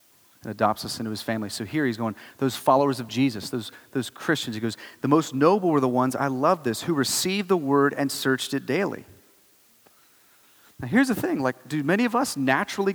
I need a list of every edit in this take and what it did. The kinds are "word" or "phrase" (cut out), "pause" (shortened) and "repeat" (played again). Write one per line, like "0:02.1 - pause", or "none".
none